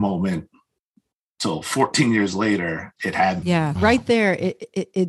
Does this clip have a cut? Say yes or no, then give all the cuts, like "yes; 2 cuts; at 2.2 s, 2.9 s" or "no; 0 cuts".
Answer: yes; 3 cuts; at 3.0 s, 3.4 s, 3.8 s